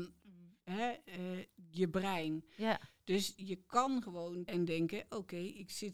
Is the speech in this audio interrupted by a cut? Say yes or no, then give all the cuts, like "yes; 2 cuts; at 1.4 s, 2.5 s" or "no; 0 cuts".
yes; 1 cut; at 4.5 s